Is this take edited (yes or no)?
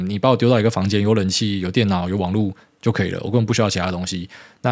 no